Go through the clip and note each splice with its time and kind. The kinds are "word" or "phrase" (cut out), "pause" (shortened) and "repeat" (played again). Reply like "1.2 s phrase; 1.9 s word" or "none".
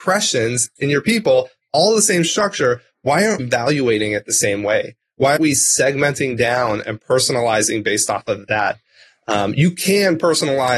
3.4 s word; 5.4 s word